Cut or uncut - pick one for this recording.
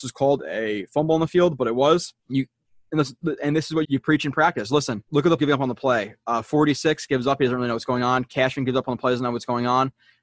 cut